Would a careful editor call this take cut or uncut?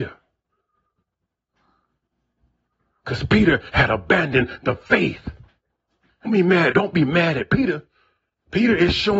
cut